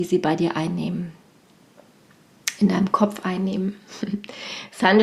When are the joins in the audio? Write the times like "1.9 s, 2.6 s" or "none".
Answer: none

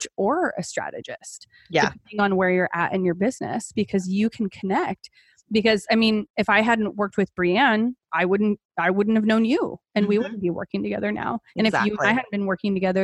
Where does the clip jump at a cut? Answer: 11.5 s

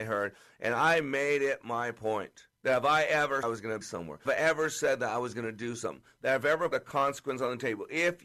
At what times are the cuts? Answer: 2.6 s, 3.4 s, 3.8 s, 4.3 s, 6.7 s

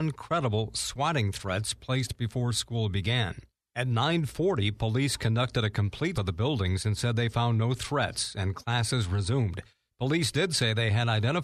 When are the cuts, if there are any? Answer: 6.1 s

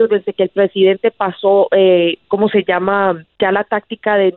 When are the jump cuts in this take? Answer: 2.2 s

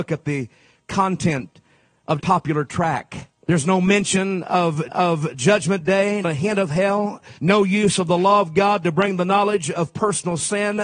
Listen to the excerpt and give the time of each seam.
2.2 s, 3.4 s, 4.9 s, 6.2 s, 7.4 s

